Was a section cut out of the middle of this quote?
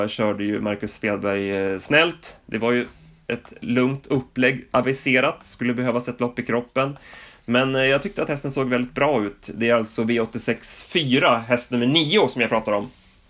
no; 0 cuts

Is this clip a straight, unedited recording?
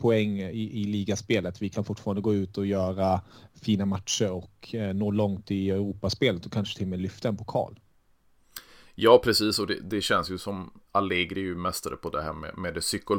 yes; 0 cuts

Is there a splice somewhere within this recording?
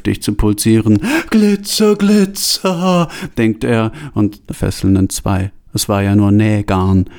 yes; 1 cut; at 4.5 s

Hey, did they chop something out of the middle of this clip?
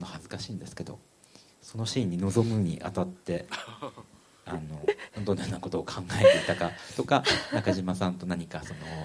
no; 0 cuts

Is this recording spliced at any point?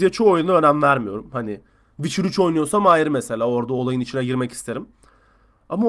no; 0 cuts

